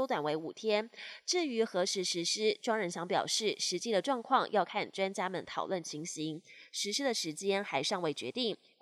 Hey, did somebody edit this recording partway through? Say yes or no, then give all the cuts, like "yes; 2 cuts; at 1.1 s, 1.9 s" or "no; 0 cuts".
no; 0 cuts